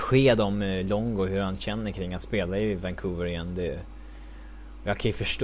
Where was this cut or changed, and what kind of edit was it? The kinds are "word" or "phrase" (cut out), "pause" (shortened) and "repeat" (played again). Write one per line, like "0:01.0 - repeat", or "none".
none